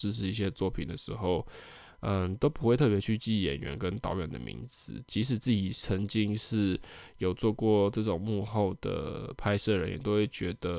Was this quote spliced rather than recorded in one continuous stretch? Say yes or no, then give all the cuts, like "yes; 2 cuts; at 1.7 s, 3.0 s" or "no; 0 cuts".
no; 0 cuts